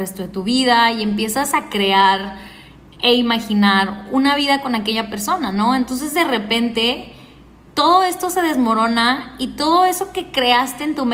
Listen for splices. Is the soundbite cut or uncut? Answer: uncut